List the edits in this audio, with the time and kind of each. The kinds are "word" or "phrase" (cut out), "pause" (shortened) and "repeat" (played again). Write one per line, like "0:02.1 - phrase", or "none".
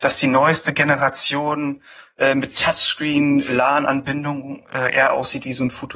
none